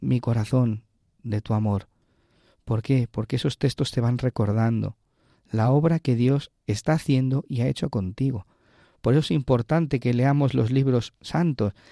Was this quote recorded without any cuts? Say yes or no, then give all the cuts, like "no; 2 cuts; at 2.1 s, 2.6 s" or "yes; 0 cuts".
yes; 0 cuts